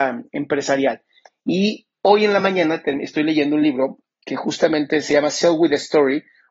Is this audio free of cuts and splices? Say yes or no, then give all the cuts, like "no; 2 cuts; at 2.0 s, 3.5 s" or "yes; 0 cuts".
yes; 0 cuts